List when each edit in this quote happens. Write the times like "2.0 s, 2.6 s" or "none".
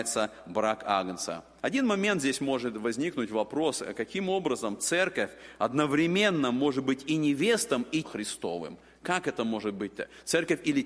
8.0 s